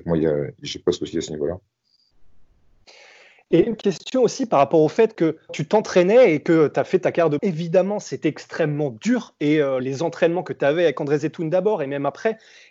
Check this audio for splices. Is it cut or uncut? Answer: cut